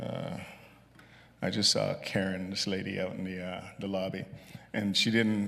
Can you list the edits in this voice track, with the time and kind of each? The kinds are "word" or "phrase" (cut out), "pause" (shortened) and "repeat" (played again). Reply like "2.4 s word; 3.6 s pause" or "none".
none